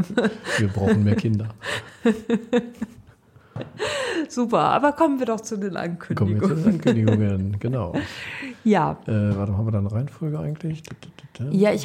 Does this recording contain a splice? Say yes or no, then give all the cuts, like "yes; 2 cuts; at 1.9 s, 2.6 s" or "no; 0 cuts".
no; 0 cuts